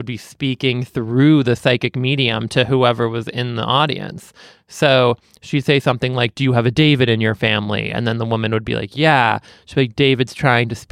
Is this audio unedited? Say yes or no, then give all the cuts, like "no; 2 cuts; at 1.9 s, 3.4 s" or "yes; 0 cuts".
yes; 0 cuts